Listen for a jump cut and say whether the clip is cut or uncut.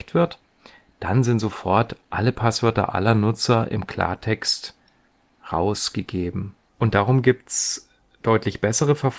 uncut